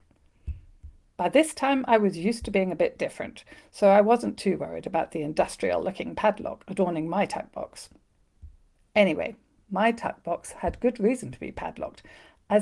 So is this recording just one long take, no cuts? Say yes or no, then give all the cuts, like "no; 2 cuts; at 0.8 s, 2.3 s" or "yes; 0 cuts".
yes; 0 cuts